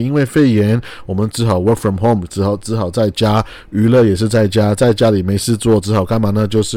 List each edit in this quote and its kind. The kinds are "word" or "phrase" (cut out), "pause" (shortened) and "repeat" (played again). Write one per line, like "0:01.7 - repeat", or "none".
none